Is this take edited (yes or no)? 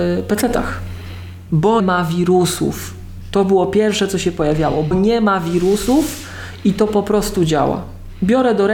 yes